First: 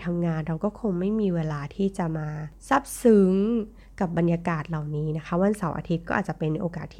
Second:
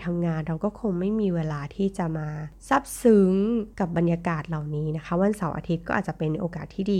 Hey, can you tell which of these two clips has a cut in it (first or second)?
second